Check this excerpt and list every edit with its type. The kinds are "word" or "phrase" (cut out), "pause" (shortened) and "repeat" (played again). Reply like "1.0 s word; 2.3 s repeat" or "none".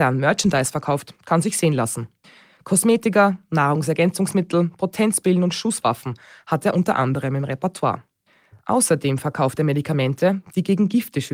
none